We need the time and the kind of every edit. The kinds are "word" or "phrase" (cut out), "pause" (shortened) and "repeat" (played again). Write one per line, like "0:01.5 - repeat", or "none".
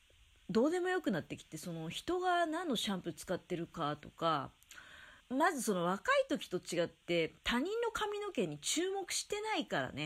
0:05.2 - pause